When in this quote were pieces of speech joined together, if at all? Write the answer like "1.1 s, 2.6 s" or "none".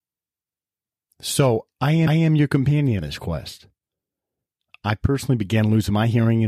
2.1 s, 3.0 s

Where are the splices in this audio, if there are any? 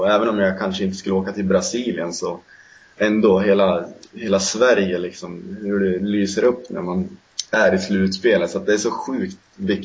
none

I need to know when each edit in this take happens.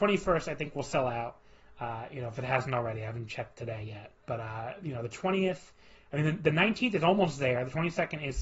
4.2 s

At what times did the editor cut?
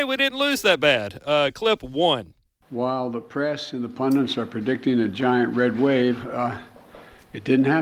none

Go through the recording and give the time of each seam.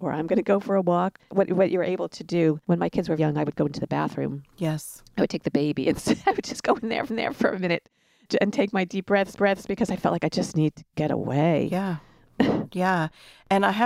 1.2 s, 2.6 s, 3.2 s, 7.1 s, 9.4 s

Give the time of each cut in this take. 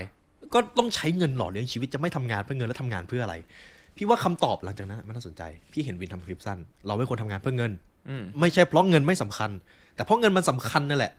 6.7 s

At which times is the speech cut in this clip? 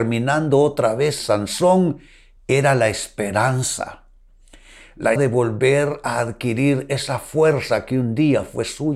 1.2 s, 5.2 s

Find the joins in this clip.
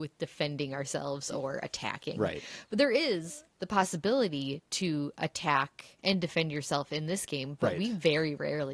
3.5 s, 6.0 s

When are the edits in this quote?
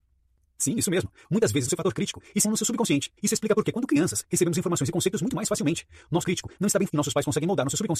1.7 s, 2.4 s, 3.2 s, 6.2 s, 6.9 s

